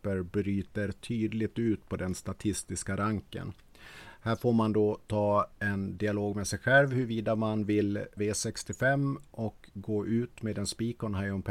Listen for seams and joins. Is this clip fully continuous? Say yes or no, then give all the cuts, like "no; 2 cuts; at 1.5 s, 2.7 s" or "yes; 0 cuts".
no; 1 cut; at 8.2 s